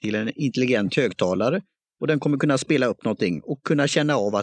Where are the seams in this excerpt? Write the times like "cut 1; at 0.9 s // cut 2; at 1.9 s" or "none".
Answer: none